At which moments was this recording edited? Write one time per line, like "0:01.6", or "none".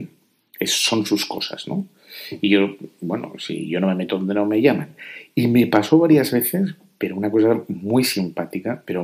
none